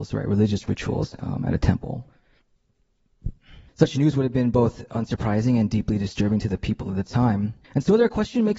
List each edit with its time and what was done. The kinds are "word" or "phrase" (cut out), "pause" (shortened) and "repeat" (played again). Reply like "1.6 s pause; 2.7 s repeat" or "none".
3.7 s pause; 7.6 s pause